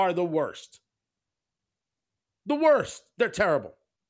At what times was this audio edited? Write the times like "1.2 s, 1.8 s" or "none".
none